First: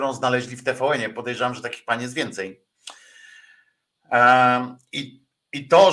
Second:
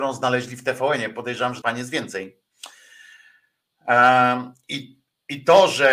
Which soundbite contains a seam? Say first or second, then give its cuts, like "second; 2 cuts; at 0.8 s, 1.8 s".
second; 1 cut; at 1.6 s